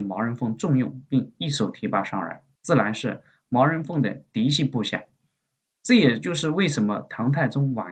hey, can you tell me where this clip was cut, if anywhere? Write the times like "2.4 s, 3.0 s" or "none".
none